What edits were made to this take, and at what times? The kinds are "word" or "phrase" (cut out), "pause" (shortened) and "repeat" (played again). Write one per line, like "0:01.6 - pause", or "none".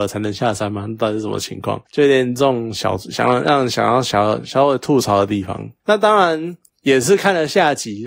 0:01.9 - pause